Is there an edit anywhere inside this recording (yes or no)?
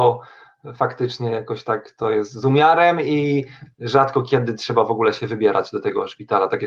no